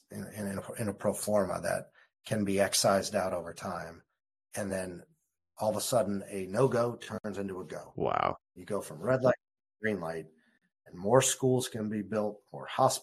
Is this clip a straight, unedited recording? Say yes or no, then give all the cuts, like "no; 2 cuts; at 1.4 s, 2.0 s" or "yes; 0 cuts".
yes; 0 cuts